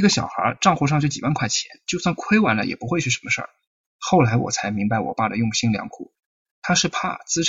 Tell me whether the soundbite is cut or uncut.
uncut